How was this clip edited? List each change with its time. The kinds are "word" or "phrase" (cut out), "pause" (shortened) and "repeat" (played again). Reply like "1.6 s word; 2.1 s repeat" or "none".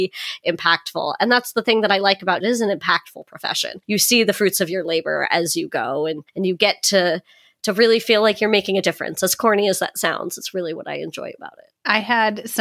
2.4 s phrase